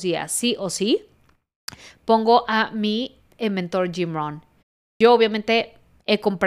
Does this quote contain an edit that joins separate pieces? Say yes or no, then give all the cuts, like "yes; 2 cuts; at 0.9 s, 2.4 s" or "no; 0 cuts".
yes; 1 cut; at 4.6 s